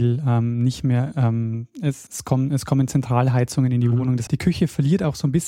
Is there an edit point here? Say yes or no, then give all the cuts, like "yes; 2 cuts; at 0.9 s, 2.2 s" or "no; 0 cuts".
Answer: yes; 2 cuts; at 2.1 s, 4.3 s